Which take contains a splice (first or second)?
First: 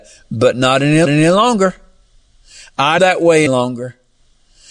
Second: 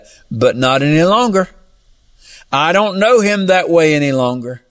first